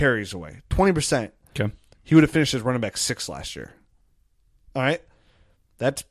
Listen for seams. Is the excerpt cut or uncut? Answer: uncut